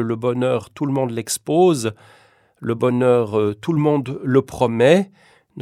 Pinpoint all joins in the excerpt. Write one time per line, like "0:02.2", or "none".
none

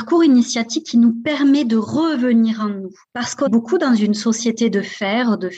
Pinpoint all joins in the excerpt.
0:03.0
0:03.5

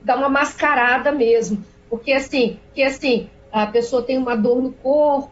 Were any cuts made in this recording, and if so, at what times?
0:02.8

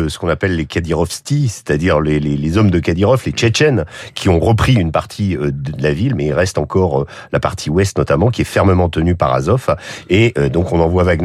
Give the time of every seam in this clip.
none

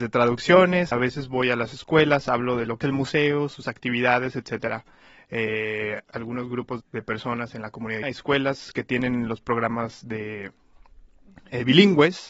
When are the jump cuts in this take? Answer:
0:00.9
0:02.8
0:06.0
0:06.8
0:08.0

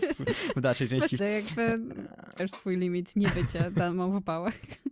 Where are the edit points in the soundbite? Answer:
0:01.2
0:02.4

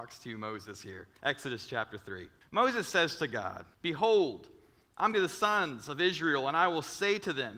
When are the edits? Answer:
0:01.2
0:02.4
0:03.7
0:05.1

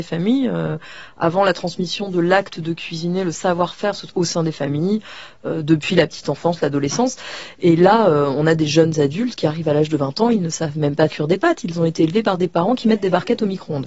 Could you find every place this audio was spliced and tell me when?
0:04.1
0:11.1

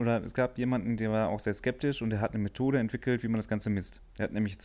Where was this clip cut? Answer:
none

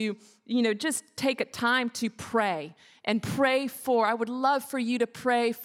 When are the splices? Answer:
none

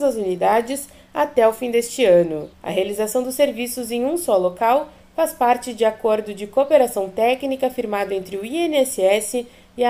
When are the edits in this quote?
0:02.5

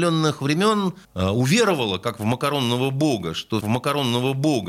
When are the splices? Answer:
0:01.0
0:03.6

